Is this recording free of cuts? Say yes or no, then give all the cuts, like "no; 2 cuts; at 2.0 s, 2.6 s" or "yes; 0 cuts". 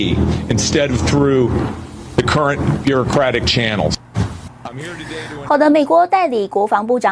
yes; 0 cuts